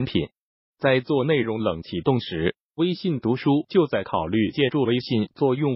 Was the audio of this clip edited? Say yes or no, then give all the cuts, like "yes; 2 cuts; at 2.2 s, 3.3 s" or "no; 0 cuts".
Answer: no; 0 cuts